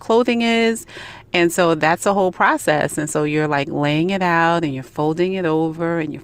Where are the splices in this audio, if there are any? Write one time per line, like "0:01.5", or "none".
none

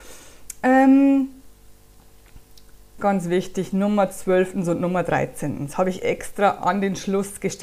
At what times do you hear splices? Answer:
0:03.0

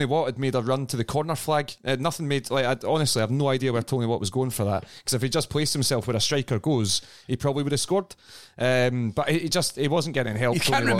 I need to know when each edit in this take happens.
none

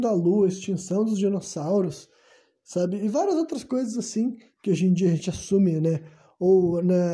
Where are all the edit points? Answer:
none

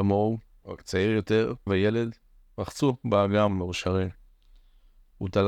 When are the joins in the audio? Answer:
0:01.7

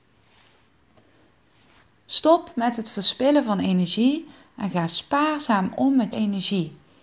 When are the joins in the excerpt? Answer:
0:06.1

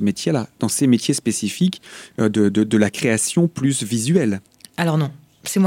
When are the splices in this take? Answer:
none

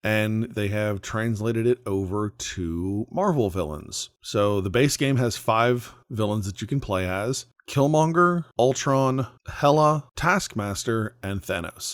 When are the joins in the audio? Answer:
none

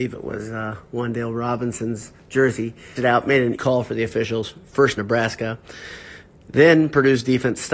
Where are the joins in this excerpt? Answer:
0:03.0
0:03.5
0:05.0

